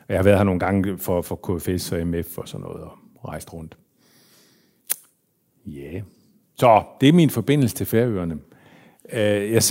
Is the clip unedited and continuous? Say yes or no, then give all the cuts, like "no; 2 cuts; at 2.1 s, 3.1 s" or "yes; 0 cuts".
yes; 0 cuts